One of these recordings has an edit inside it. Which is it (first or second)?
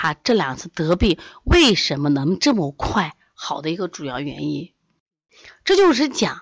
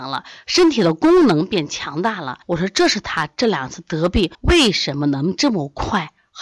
second